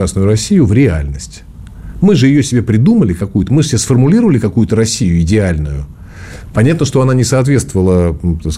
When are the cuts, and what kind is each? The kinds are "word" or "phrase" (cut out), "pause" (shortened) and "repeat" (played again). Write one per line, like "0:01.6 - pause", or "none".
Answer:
none